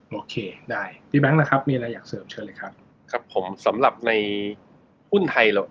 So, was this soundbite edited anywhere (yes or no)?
yes